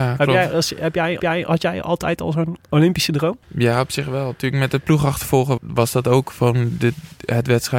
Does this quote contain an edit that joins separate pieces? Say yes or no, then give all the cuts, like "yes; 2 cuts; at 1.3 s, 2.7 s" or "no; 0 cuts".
yes; 4 cuts; at 1.2 s, 2.6 s, 3.4 s, 5.6 s